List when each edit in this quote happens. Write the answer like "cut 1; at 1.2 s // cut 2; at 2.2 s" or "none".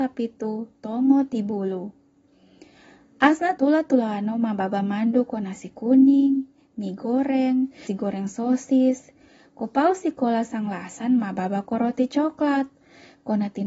cut 1; at 3.6 s // cut 2; at 7.9 s